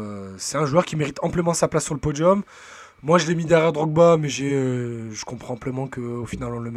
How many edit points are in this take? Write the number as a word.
zero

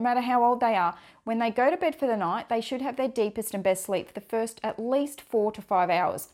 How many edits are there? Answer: zero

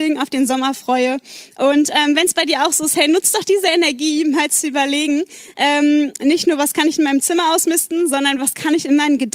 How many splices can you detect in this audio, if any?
zero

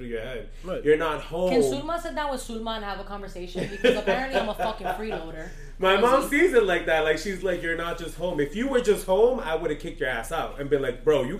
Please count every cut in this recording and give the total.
zero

